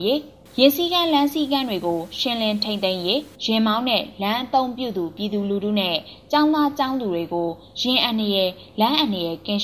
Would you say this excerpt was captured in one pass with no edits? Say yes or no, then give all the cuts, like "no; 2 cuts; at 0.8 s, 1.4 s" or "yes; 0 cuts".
no; 1 cut; at 3.3 s